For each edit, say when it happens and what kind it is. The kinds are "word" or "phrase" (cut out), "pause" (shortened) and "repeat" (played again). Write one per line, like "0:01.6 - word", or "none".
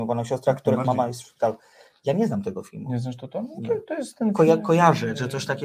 none